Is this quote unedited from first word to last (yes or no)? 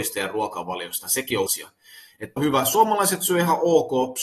no